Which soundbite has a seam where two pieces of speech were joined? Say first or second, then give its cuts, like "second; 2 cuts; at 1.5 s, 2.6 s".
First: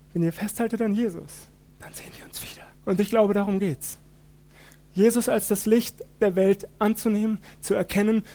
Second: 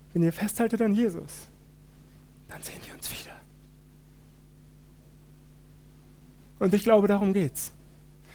first; 2 cuts; at 1.7 s, 2.7 s